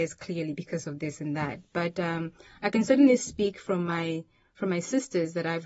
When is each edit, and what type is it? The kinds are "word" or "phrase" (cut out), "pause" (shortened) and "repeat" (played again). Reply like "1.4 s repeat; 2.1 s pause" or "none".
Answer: none